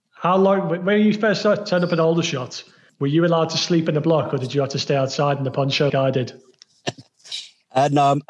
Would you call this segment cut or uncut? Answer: cut